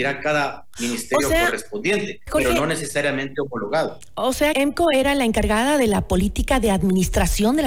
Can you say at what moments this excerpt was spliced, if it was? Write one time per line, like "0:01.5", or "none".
0:02.3
0:04.5